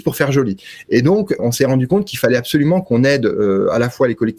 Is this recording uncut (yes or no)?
no